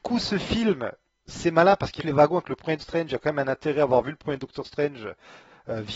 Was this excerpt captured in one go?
no; 2 cuts; at 2.0 s, 2.8 s

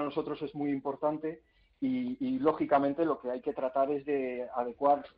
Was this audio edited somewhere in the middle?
no; 0 cuts

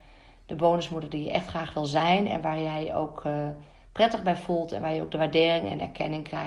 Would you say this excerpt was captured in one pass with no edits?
yes; 0 cuts

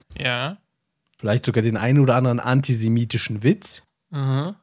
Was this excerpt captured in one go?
yes; 0 cuts

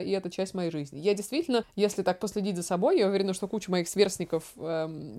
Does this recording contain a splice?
no; 0 cuts

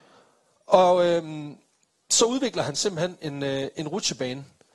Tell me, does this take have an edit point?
no; 0 cuts

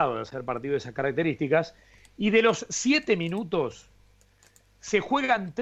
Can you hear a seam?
no; 0 cuts

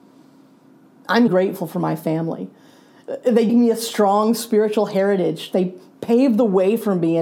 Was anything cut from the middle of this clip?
yes; 2 cuts; at 1.3 s, 3.5 s

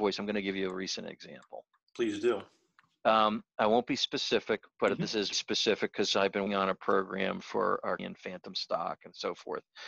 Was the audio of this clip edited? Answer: yes; 3 cuts; at 5.3 s, 6.5 s, 8.0 s

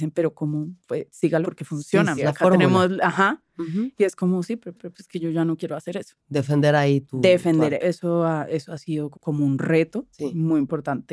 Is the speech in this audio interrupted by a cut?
yes; 6 cuts; at 1.4 s, 2.2 s, 4.8 s, 7.8 s, 9.1 s, 10.1 s

